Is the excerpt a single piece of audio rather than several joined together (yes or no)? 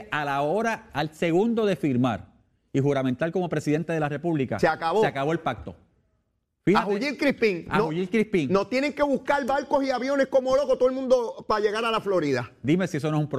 yes